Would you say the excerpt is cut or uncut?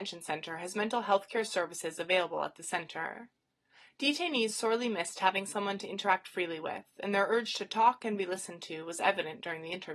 uncut